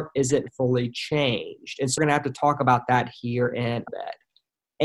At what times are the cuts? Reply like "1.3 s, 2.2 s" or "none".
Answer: 2.0 s, 3.9 s

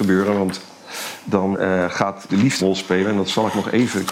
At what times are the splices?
1.5 s, 2.3 s, 2.6 s

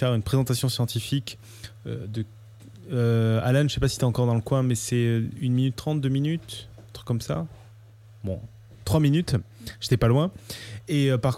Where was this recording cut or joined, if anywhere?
none

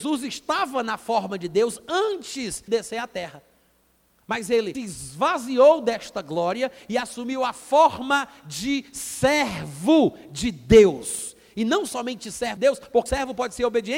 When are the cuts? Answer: 2.7 s, 4.7 s, 12.6 s, 13.1 s

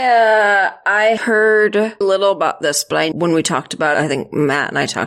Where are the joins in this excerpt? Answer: 1.2 s, 2.0 s, 3.1 s, 3.9 s

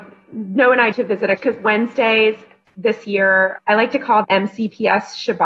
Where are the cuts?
0.9 s, 1.4 s, 3.6 s, 4.2 s

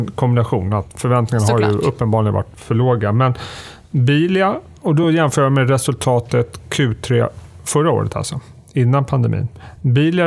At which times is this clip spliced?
none

